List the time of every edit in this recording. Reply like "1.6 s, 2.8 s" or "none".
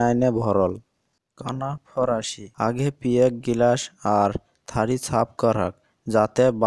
2.5 s